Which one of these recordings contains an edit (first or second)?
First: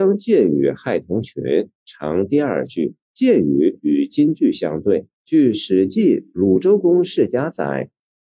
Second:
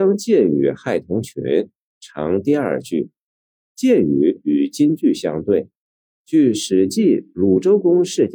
first